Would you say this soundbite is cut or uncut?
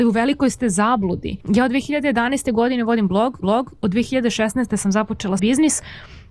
cut